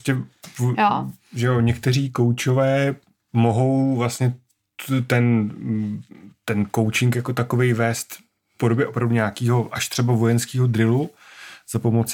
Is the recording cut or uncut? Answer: uncut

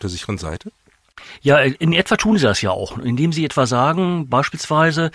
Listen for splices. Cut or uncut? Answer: uncut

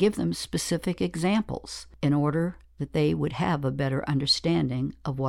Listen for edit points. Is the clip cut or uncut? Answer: uncut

